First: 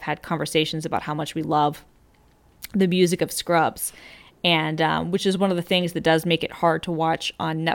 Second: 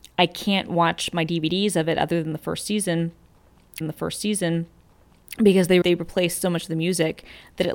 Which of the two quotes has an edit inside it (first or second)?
second